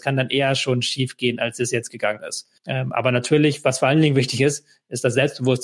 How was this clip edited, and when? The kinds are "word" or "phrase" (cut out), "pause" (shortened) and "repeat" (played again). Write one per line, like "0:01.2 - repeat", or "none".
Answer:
0:01.9 - phrase
0:02.6 - pause